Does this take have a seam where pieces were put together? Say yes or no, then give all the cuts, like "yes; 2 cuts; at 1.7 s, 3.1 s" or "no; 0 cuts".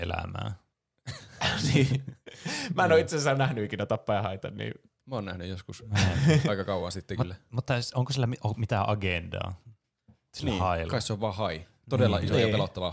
no; 0 cuts